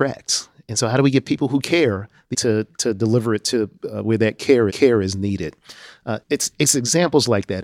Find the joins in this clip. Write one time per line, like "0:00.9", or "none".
0:02.3
0:04.7
0:06.2